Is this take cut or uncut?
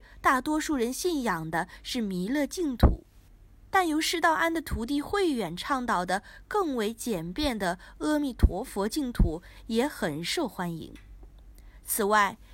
uncut